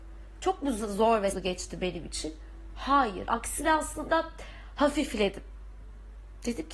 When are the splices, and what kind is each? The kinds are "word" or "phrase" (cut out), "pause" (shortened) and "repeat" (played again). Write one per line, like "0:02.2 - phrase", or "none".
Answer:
0:01.3 - word